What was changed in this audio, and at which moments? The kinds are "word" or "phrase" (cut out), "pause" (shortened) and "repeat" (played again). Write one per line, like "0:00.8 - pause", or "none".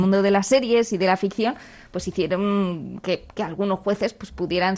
none